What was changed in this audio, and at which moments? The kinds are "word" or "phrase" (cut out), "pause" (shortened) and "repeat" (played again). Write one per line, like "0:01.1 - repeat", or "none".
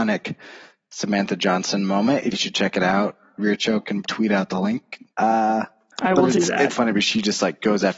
0:02.3 - phrase
0:04.0 - word
0:05.1 - pause
0:06.7 - word